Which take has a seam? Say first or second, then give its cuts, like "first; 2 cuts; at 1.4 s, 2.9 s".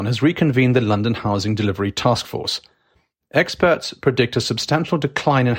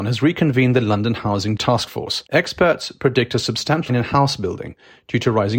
second; 3 cuts; at 1.6 s, 2.3 s, 3.9 s